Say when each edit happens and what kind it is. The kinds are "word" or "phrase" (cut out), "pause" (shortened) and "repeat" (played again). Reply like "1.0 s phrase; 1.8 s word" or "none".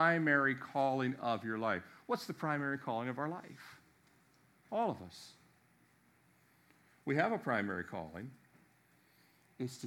none